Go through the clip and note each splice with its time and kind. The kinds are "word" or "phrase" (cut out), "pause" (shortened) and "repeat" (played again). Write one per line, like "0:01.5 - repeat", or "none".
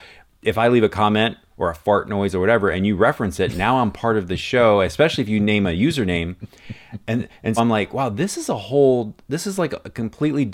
0:07.6 - word